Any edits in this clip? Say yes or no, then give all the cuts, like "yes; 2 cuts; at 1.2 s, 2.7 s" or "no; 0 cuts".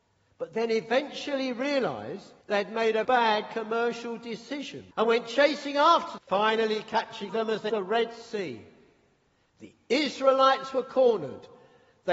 yes; 6 cuts; at 2.4 s, 3.0 s, 4.9 s, 6.2 s, 7.3 s, 7.7 s